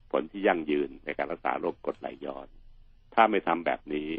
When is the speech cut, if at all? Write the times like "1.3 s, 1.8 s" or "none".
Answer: none